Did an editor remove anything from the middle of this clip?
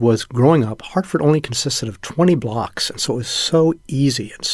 no; 0 cuts

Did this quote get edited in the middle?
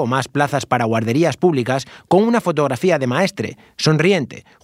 no; 0 cuts

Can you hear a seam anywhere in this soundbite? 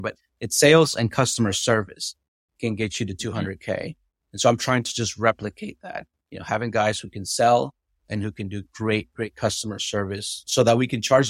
no; 0 cuts

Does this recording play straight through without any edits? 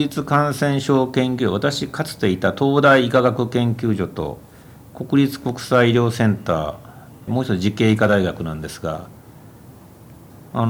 no; 1 cut; at 7.3 s

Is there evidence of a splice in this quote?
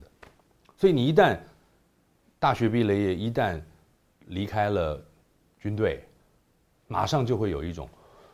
no; 0 cuts

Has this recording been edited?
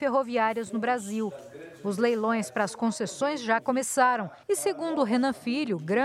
yes; 1 cut; at 4.4 s

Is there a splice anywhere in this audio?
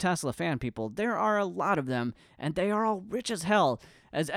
no; 0 cuts

